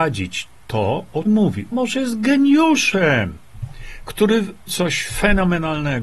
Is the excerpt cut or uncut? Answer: cut